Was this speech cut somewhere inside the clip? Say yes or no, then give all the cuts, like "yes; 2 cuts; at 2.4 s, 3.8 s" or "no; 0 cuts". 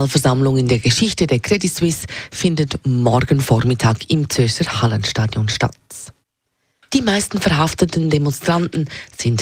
no; 0 cuts